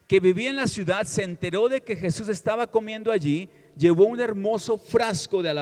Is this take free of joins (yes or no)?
yes